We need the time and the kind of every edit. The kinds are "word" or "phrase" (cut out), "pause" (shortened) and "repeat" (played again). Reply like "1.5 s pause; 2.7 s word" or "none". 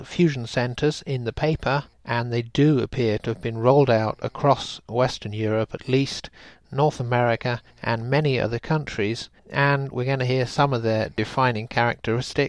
1.9 s pause; 7.7 s pause; 9.4 s pause

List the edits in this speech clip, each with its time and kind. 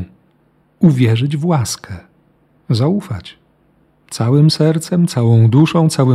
none

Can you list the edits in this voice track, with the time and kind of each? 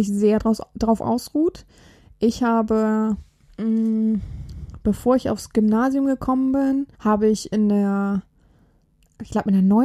6.9 s pause

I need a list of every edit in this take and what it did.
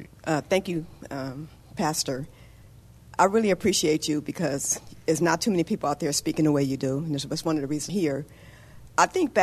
7.9 s word

